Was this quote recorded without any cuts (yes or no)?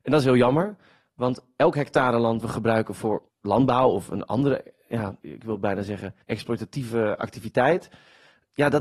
no